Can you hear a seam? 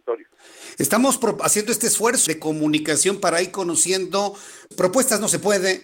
yes; 2 cuts; at 2.3 s, 4.7 s

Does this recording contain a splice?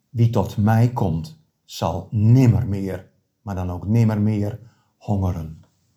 no; 0 cuts

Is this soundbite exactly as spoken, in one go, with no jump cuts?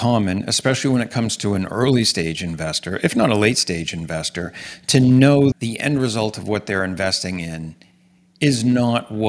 no; 1 cut; at 5.5 s

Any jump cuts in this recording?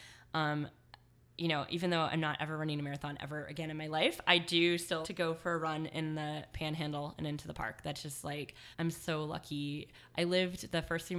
yes; 2 cuts; at 5.0 s, 8.7 s

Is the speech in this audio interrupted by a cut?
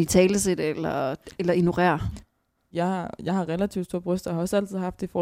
no; 0 cuts

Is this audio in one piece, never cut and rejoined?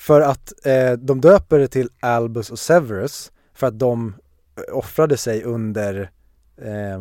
yes; 0 cuts

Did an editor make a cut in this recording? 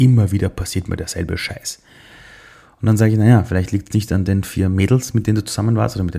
no; 0 cuts

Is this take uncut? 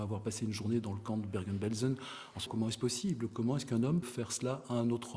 no; 2 cuts; at 2.5 s, 4.0 s

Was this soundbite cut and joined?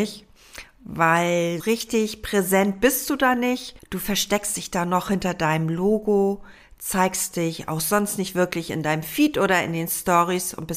yes; 2 cuts; at 1.6 s, 3.8 s

